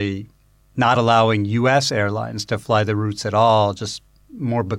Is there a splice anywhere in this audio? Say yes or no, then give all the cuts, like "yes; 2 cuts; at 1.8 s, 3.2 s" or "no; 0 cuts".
no; 0 cuts